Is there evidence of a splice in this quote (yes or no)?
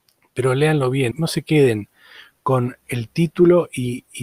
yes